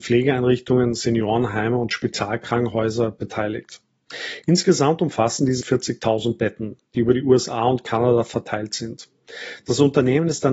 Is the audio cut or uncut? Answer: cut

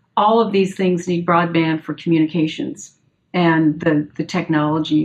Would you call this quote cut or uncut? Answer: uncut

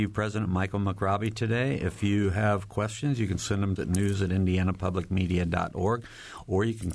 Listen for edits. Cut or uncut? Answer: cut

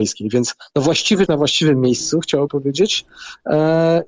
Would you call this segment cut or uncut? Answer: cut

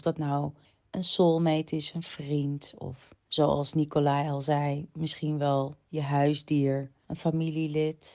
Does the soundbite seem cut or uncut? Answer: cut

